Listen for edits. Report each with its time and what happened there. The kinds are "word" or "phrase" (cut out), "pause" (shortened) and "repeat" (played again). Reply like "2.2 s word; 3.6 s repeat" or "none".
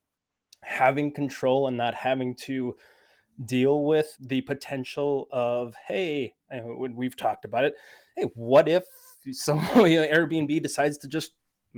4.2 s word